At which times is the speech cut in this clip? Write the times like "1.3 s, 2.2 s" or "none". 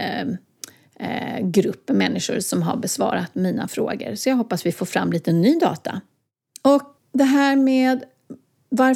7.0 s